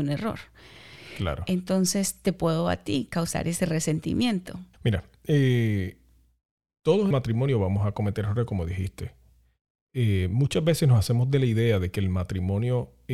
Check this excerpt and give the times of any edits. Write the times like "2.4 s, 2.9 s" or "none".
4.7 s, 7.1 s